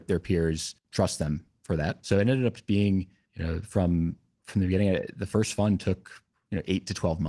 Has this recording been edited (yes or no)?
no